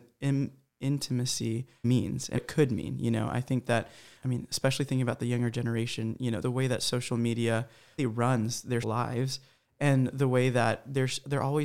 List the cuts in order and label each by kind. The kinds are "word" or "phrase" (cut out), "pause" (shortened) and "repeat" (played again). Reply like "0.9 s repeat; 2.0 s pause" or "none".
1.8 s word; 2.4 s word; 4.2 s word; 6.4 s word; 8.0 s word; 8.8 s word